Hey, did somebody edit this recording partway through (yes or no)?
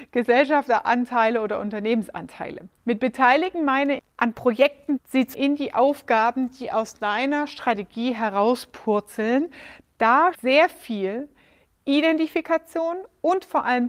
yes